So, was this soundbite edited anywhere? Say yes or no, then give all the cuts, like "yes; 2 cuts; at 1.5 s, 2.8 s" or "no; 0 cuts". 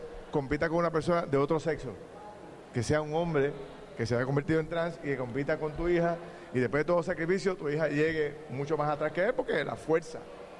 no; 0 cuts